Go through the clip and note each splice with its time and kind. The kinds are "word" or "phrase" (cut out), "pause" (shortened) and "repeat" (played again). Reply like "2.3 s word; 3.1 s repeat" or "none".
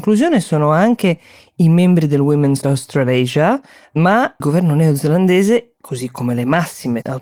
2.6 s word; 4.4 s word